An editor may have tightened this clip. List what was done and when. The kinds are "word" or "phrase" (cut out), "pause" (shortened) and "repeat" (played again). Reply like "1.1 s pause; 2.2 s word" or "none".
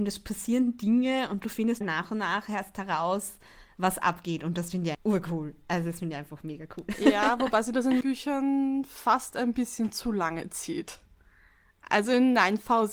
1.8 s word; 4.9 s word; 8.0 s word